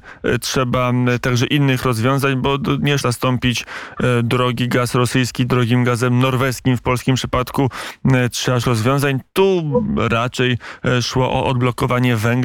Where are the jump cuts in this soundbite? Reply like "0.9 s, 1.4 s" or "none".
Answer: 3.0 s, 8.6 s